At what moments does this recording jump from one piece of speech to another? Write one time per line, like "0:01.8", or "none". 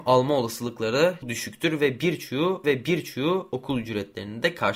0:01.2
0:02.6